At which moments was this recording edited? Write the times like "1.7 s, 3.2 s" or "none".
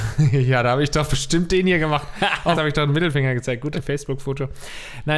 2.5 s, 3.7 s